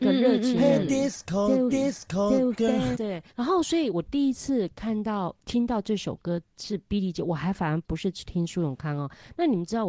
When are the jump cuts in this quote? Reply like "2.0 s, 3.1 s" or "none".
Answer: 1.7 s, 2.9 s, 3.3 s